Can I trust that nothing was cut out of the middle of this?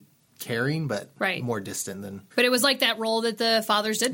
no; 1 cut; at 2.3 s

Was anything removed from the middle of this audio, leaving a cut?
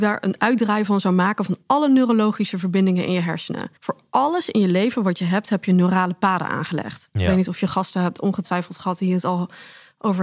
yes; 1 cut; at 3.8 s

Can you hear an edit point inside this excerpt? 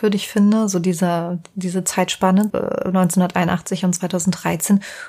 yes; 1 cut; at 2.5 s

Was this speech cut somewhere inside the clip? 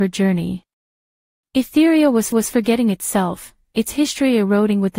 yes; 1 cut; at 2.3 s

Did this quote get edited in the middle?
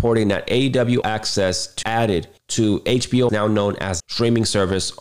yes; 5 cuts; at 1.0 s, 1.8 s, 2.4 s, 3.3 s, 4.0 s

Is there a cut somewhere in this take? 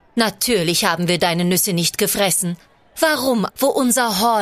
yes; 1 cut; at 3.5 s

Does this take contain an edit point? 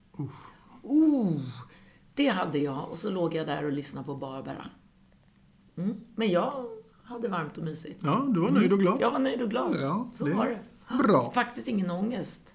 no; 0 cuts

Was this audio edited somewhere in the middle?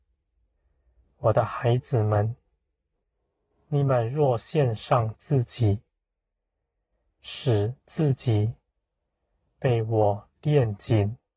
no; 0 cuts

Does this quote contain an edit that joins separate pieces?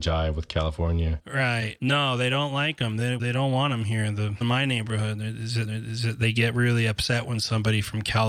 yes; 2 cuts; at 4.4 s, 5.6 s

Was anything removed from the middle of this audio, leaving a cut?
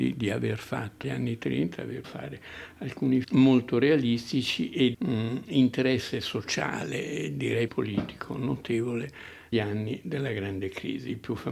yes; 6 cuts; at 1.0 s, 2.0 s, 3.2 s, 4.9 s, 7.7 s, 9.5 s

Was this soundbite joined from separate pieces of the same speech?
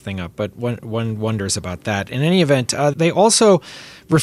yes; 1 cut; at 2.9 s

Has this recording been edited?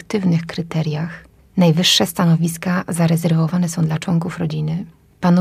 no; 0 cuts

